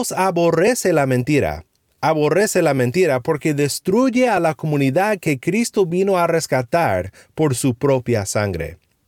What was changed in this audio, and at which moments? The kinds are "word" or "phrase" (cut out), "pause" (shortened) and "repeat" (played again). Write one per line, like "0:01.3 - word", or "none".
none